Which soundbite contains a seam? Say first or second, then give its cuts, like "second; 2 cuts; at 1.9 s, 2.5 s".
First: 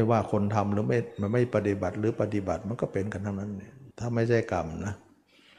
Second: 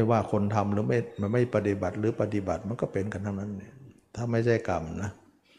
first; 1 cut; at 3.9 s